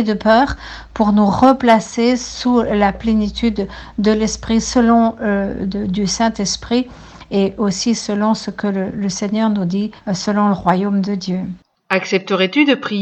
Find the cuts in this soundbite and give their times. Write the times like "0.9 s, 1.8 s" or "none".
10.0 s